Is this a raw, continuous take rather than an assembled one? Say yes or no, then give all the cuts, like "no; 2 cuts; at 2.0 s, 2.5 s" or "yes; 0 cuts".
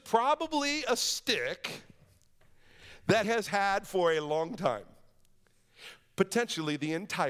no; 1 cut; at 3.2 s